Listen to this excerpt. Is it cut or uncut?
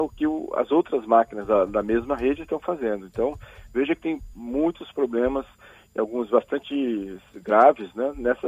uncut